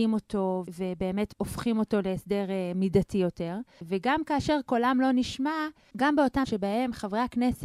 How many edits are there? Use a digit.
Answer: 1